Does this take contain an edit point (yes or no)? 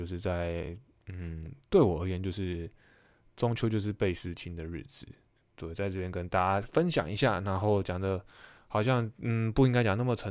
no